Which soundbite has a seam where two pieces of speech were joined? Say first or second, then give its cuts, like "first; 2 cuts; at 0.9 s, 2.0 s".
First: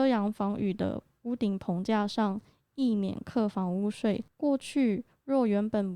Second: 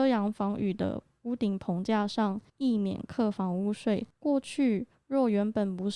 second; 1 cut; at 2.5 s